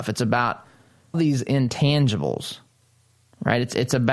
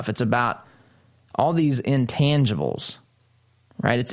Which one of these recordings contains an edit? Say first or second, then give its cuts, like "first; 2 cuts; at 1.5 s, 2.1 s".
first; 1 cut; at 1.1 s